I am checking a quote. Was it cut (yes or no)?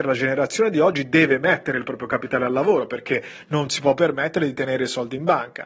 no